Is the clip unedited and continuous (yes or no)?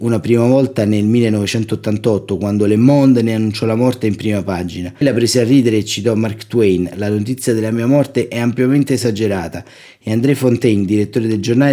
no